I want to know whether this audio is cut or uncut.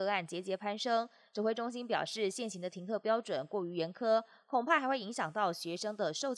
uncut